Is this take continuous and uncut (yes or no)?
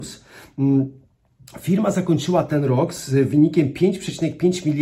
yes